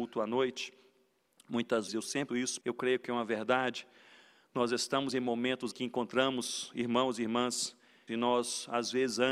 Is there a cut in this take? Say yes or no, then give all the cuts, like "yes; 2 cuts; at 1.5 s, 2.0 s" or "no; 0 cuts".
yes; 5 cuts; at 1.9 s, 2.3 s, 2.6 s, 5.7 s, 8.1 s